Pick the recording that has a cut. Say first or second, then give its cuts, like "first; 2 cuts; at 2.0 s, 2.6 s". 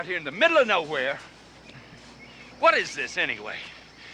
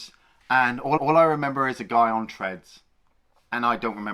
second; 1 cut; at 1.0 s